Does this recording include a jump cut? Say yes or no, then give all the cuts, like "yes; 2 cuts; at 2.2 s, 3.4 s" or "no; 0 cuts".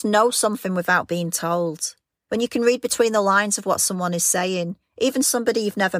no; 0 cuts